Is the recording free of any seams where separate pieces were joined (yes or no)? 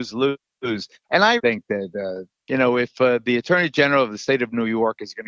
no